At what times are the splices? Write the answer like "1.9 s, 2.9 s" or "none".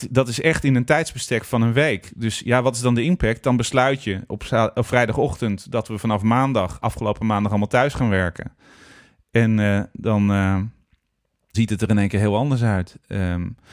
11.5 s

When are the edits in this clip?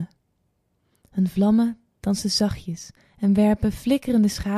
3.0 s

